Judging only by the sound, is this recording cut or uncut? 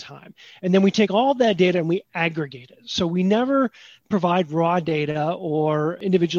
uncut